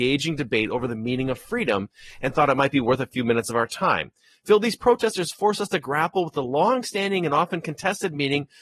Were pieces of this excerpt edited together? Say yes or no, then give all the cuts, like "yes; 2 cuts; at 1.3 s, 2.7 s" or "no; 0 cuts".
no; 0 cuts